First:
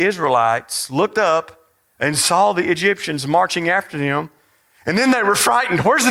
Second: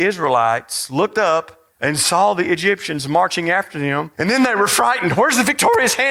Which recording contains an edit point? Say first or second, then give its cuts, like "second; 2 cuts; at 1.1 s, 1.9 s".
second; 2 cuts; at 1.7 s, 4.1 s